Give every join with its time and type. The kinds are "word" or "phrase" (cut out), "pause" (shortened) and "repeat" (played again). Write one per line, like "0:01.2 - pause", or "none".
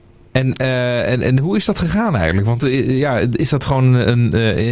none